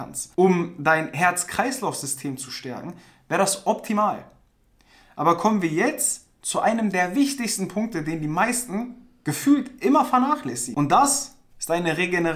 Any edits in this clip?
no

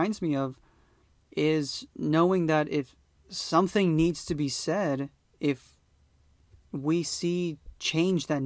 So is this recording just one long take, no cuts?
yes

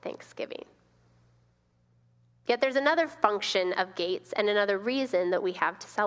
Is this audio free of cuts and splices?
yes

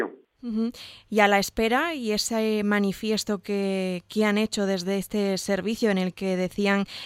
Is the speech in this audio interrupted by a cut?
no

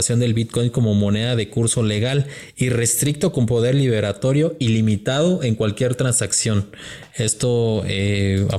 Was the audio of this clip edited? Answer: no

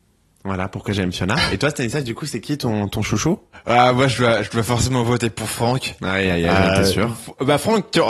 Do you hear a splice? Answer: no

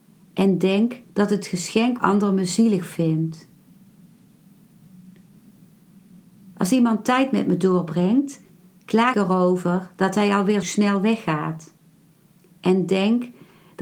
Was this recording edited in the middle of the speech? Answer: yes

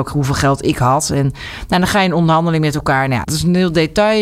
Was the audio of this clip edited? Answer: yes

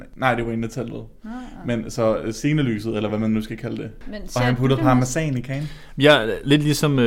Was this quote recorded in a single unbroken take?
yes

